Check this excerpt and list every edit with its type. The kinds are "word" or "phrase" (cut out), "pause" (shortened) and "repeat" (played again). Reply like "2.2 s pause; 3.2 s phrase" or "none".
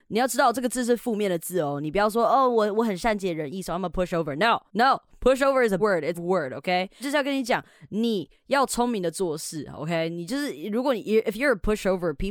4.7 s pause; 5.8 s word; 6.1 s phrase; 7.0 s phrase